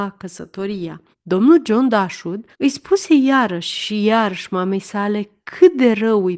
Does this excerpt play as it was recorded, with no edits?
no; 2 cuts; at 1.1 s, 2.5 s

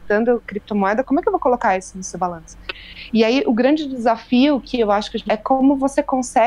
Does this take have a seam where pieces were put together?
yes; 1 cut; at 5.3 s

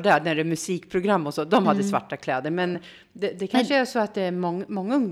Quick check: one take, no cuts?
yes; 0 cuts

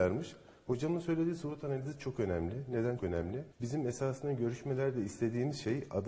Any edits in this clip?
yes; 2 cuts; at 3.0 s, 3.5 s

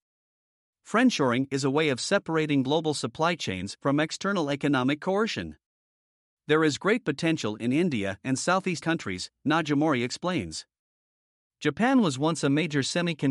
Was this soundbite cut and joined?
yes; 1 cut; at 8.8 s

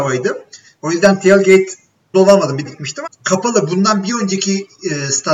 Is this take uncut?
no; 3 cuts; at 2.1 s, 2.6 s, 3.1 s

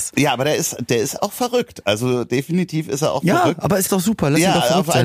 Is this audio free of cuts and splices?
no; 1 cut; at 3.9 s

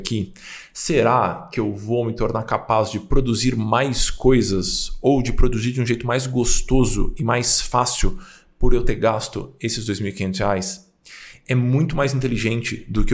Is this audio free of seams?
yes; 0 cuts

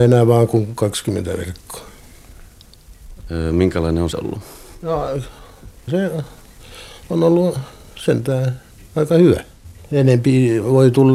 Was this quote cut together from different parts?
yes; 3 cuts; at 4.1 s, 5.9 s, 8.7 s

